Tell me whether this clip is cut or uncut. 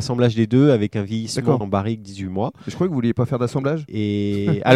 cut